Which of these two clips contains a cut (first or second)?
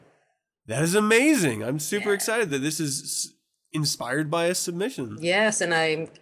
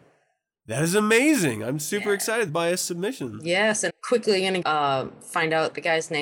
second